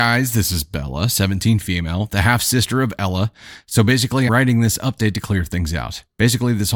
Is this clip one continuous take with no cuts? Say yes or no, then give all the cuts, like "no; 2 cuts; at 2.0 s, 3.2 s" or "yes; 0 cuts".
no; 1 cut; at 4.3 s